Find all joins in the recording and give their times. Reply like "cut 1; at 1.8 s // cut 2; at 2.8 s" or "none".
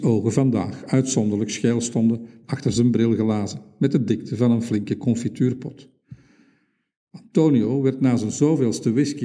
none